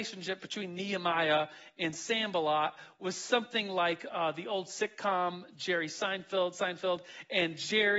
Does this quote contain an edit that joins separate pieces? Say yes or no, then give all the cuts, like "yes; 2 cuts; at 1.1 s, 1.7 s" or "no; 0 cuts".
no; 0 cuts